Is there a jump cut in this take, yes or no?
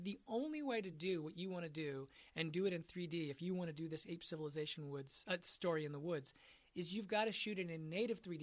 no